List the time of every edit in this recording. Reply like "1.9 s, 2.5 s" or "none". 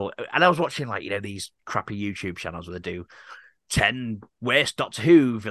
none